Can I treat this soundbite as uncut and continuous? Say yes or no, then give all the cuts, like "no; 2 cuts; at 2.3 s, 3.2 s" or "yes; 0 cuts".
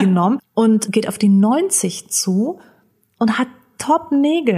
yes; 0 cuts